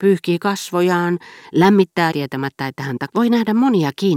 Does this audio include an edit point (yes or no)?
yes